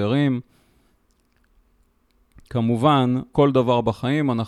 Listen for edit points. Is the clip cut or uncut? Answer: cut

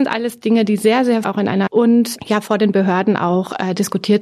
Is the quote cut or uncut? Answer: cut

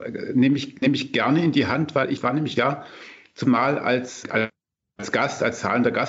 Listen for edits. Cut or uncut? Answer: cut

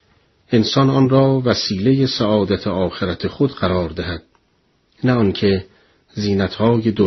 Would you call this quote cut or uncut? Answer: uncut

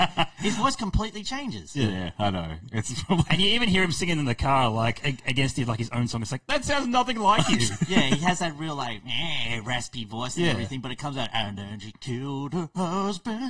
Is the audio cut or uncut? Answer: uncut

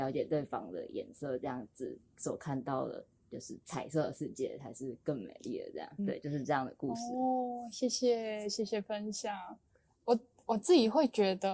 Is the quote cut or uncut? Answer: cut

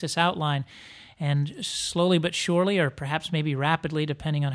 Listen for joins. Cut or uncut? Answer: uncut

